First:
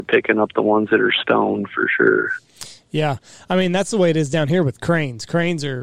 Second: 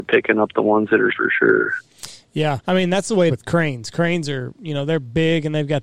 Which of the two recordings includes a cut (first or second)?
second